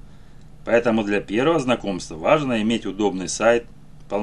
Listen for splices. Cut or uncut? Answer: uncut